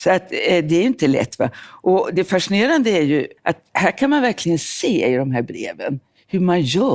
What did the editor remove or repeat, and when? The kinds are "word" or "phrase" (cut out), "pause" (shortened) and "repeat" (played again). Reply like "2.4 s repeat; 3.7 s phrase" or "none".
3.4 s pause